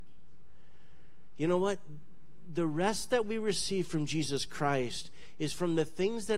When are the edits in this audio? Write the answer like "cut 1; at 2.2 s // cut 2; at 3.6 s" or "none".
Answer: none